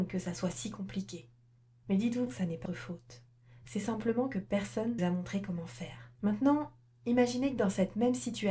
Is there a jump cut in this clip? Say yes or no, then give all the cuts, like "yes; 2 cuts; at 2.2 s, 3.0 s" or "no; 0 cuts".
yes; 5 cuts; at 1.6 s, 2.3 s, 2.7 s, 5.0 s, 6.2 s